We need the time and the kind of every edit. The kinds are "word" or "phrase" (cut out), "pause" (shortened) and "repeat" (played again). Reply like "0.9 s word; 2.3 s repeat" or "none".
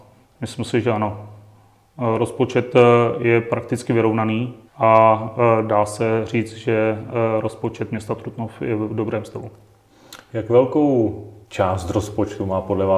4.7 s pause; 11.4 s pause